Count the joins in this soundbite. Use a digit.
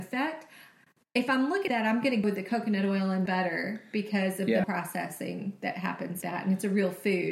5